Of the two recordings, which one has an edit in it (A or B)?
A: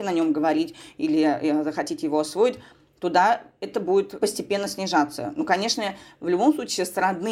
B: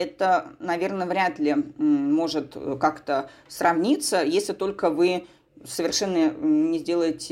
A